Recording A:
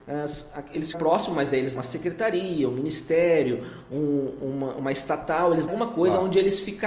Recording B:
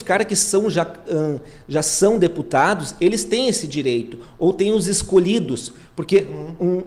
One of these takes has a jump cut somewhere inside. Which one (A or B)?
A